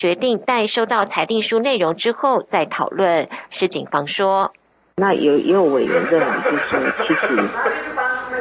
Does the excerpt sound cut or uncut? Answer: uncut